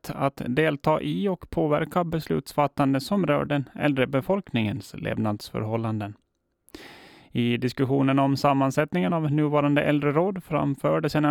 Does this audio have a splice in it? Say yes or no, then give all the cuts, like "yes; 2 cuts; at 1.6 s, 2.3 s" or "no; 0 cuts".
no; 0 cuts